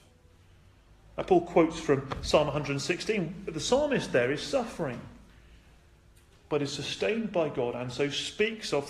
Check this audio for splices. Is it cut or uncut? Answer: uncut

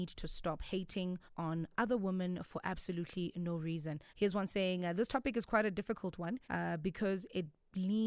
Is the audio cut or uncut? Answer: cut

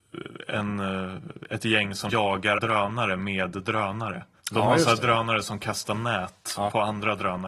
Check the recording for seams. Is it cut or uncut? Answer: cut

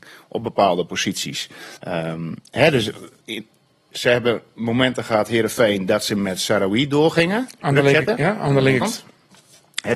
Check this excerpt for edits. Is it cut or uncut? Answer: cut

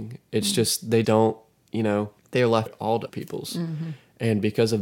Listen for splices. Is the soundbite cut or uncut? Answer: cut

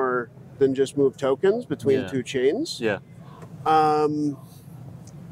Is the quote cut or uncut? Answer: uncut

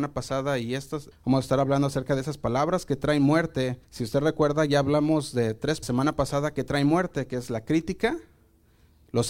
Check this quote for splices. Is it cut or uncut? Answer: cut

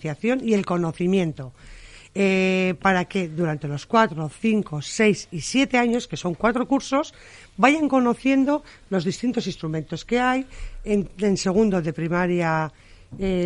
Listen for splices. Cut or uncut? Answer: uncut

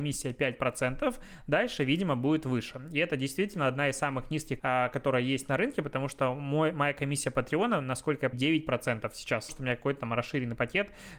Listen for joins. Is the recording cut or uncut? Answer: cut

